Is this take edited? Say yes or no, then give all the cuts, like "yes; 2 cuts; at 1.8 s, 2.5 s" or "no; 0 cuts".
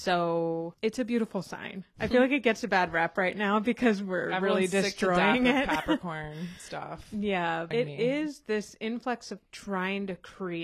no; 0 cuts